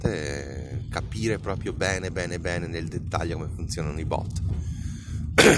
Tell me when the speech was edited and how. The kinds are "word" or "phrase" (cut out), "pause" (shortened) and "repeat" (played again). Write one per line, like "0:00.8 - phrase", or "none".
none

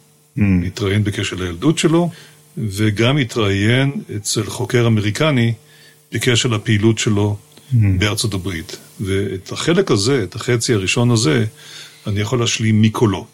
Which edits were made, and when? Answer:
none

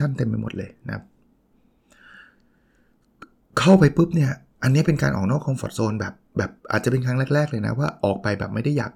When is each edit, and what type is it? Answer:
0:06.6 - pause

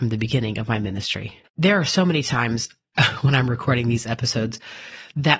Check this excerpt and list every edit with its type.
0:01.5 - pause

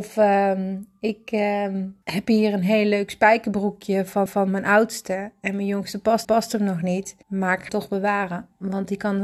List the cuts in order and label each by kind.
0:02.0 - pause
0:04.3 - repeat
0:06.2 - repeat
0:07.2 - pause
0:07.7 - word

